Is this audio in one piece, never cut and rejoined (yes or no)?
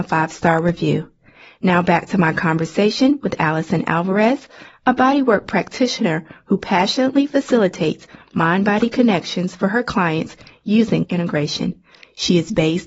no